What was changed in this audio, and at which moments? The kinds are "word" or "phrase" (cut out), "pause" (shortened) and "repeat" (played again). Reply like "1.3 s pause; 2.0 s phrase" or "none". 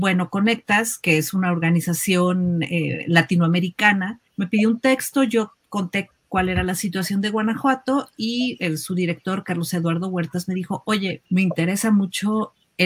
4.3 s pause; 11.3 s pause

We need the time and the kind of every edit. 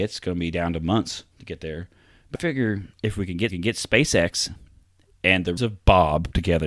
1.3 s pause; 2.3 s word; 2.9 s pause; 3.5 s repeat; 5.6 s word

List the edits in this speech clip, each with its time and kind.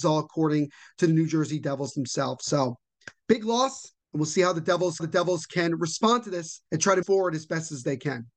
4.0 s pause; 5.0 s repeat; 6.7 s pause; 7.0 s word

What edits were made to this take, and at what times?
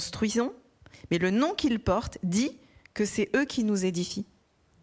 none

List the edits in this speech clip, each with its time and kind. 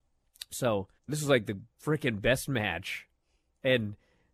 1.0 s pause; 1.7 s pause

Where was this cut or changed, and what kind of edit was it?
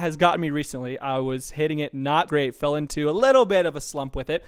2.3 s word

